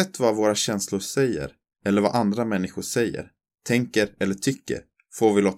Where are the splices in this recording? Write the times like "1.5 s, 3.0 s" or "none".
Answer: none